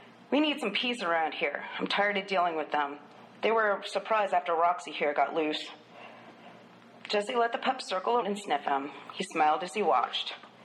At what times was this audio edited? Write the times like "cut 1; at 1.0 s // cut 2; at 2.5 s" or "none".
cut 1; at 8.2 s